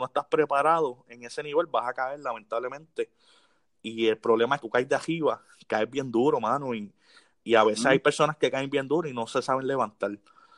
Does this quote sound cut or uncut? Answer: cut